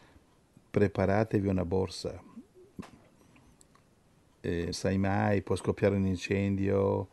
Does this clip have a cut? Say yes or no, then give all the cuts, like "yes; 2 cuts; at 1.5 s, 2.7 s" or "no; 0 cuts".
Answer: yes; 1 cut; at 4.7 s